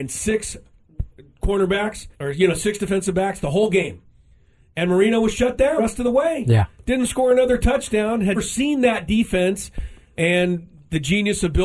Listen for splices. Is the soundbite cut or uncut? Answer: cut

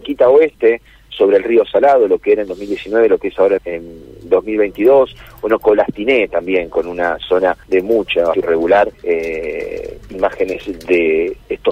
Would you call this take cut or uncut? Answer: cut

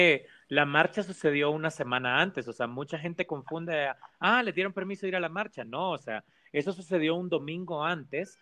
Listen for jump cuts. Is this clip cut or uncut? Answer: uncut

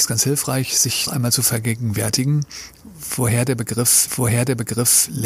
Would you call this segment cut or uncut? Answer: cut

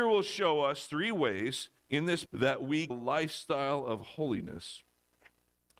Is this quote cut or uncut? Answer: cut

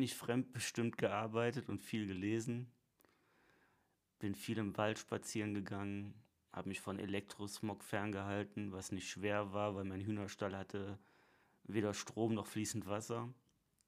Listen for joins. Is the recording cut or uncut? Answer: uncut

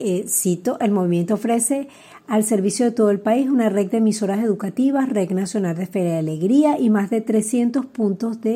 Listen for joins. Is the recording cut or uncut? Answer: uncut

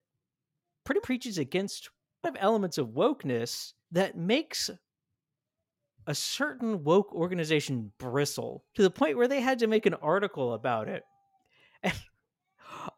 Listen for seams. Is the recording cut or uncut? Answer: cut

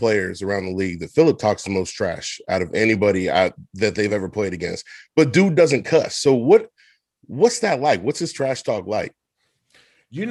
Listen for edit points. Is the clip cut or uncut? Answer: uncut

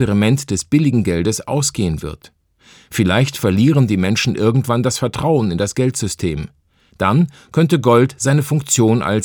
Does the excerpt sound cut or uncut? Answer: uncut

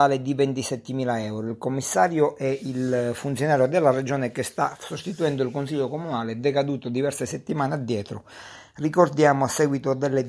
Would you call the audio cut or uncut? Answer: uncut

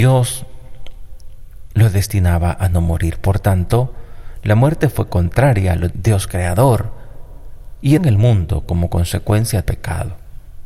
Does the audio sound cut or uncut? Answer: cut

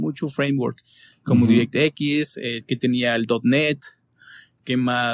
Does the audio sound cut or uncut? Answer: uncut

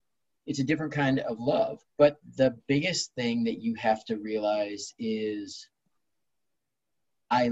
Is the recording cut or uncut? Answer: cut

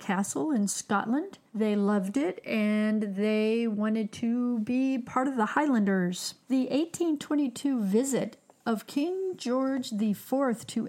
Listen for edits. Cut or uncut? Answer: cut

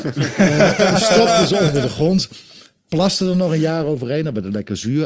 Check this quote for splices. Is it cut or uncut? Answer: uncut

